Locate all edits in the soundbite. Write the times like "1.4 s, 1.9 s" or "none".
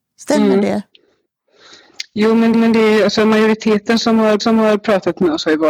2.5 s, 4.4 s